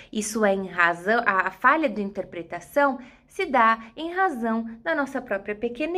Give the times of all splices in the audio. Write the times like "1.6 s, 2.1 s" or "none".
none